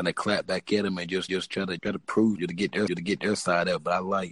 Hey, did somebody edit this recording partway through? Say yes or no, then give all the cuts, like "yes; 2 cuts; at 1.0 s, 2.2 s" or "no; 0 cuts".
yes; 4 cuts; at 1.3 s, 1.8 s, 2.4 s, 2.9 s